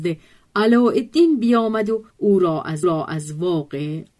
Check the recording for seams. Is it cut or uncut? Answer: cut